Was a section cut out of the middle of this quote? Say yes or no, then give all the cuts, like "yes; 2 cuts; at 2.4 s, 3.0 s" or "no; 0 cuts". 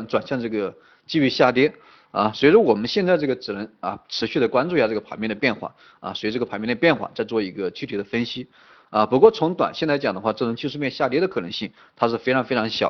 no; 0 cuts